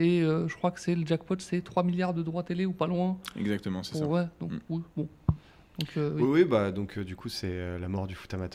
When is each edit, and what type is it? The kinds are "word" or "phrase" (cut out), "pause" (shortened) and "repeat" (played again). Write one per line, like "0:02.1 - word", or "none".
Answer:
none